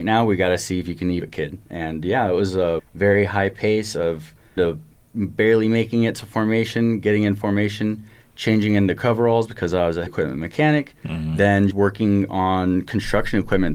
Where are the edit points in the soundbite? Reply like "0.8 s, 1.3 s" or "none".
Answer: 1.2 s, 2.8 s, 4.6 s, 5.1 s, 10.1 s, 11.7 s